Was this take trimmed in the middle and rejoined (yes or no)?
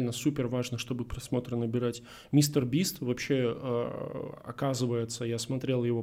no